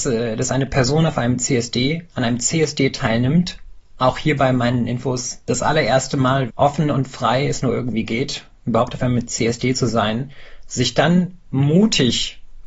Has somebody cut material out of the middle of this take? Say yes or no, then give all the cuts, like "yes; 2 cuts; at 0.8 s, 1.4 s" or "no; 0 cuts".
yes; 2 cuts; at 5.4 s, 6.5 s